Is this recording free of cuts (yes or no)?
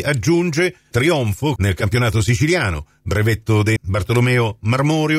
no